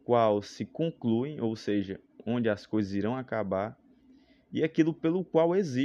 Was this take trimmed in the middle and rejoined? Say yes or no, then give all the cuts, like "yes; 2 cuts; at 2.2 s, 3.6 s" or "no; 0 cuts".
no; 0 cuts